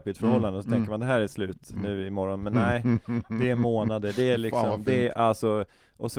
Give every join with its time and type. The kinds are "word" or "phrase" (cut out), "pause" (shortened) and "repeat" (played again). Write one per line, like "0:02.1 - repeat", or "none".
none